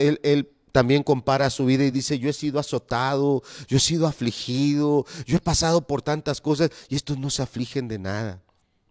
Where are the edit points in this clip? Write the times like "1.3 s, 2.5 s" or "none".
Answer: none